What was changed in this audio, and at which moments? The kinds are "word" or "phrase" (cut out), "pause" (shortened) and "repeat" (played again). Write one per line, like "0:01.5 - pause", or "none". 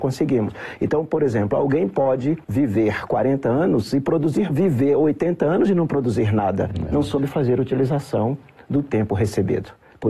0:02.4 - pause
0:04.5 - phrase